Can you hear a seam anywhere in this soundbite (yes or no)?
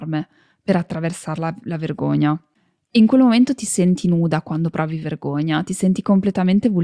no